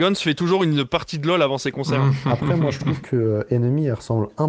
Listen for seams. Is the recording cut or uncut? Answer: uncut